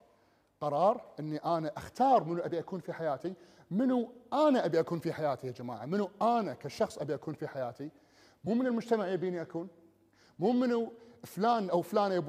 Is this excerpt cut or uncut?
uncut